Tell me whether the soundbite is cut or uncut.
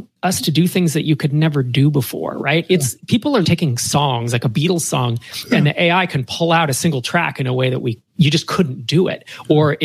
cut